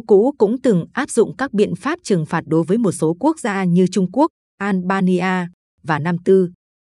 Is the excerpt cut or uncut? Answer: uncut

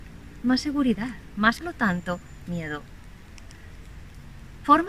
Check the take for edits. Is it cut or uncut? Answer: cut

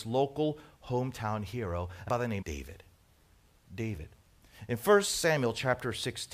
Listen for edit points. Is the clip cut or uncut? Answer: cut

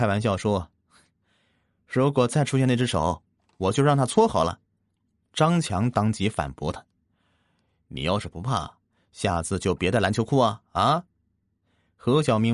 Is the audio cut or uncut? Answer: cut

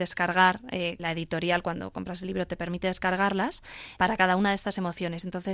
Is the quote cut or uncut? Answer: cut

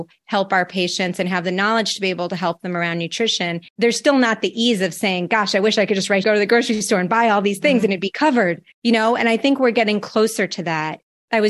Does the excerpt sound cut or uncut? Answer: cut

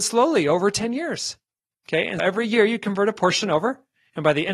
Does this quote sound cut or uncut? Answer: cut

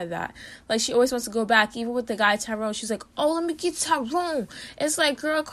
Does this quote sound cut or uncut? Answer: uncut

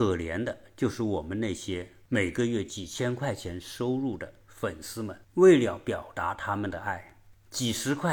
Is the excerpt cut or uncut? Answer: cut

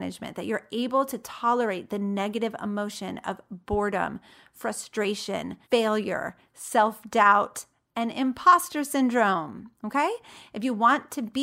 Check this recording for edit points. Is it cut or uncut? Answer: cut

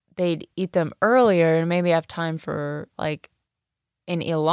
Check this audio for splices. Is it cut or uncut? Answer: uncut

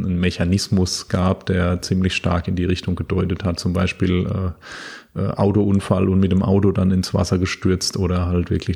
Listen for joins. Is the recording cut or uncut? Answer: uncut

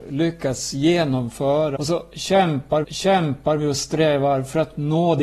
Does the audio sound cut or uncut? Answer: cut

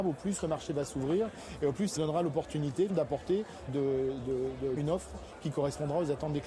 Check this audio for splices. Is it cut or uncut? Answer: cut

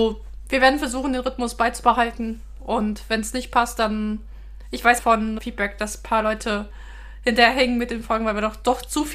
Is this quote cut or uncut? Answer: cut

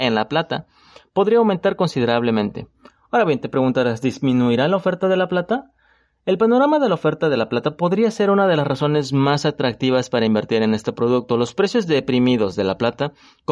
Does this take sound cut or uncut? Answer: uncut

